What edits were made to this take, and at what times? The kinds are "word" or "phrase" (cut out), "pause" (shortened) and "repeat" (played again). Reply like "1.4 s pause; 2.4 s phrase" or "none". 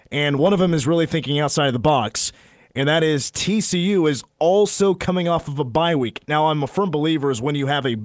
none